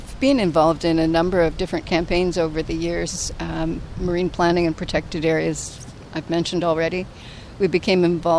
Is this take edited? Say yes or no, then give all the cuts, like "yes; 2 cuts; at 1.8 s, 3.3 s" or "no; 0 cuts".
no; 0 cuts